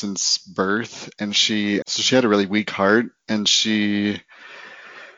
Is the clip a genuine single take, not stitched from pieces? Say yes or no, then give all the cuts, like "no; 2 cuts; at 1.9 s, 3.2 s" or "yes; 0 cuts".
no; 1 cut; at 1.8 s